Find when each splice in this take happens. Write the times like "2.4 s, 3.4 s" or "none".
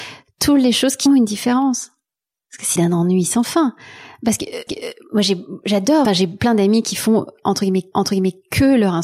1.1 s, 2.2 s, 2.8 s, 4.7 s, 6.0 s, 7.9 s